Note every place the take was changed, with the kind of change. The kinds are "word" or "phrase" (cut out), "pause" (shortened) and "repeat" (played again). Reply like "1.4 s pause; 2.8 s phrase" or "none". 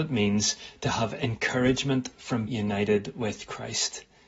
2.5 s word

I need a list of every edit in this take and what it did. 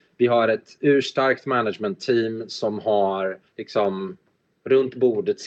3.5 s pause

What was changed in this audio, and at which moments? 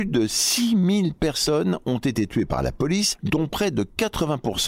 none

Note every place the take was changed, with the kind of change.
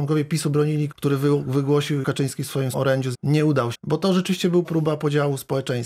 0.9 s word; 2.0 s word; 2.7 s word; 3.1 s word; 3.7 s word; 4.6 s word

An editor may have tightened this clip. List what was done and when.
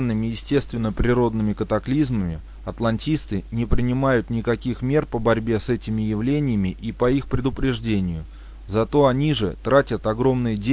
none

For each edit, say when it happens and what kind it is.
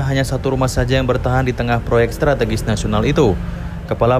none

